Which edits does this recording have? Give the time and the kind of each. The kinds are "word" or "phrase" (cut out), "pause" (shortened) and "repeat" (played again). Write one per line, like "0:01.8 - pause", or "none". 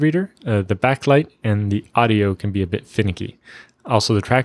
none